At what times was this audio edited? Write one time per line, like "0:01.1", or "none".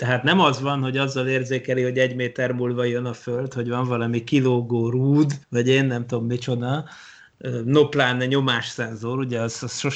0:05.4